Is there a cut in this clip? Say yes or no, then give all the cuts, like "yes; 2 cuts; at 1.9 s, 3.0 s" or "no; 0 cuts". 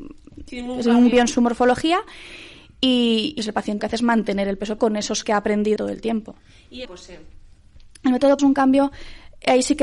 yes; 8 cuts; at 1.1 s, 3.4 s, 3.8 s, 4.8 s, 5.2 s, 5.8 s, 6.8 s, 8.4 s